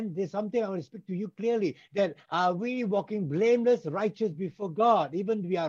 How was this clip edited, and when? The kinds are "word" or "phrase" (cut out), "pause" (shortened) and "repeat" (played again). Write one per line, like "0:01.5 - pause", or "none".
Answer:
none